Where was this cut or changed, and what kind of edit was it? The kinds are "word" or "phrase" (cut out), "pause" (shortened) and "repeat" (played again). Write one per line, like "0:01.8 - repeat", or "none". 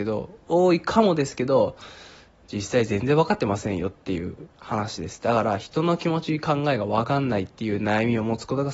none